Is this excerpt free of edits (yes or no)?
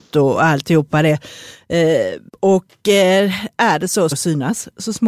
no